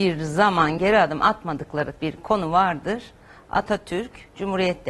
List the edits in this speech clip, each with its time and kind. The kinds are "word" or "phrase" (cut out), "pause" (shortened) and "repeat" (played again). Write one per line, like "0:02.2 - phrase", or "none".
0:02.0 - word